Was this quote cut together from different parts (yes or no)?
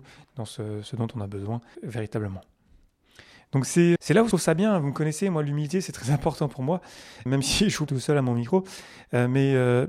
yes